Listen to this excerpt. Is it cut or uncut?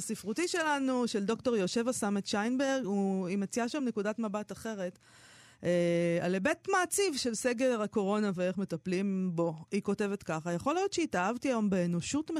uncut